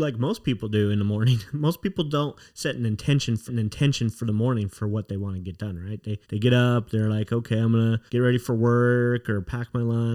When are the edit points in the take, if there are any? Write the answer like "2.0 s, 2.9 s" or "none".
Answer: 3.5 s, 6.2 s, 8.1 s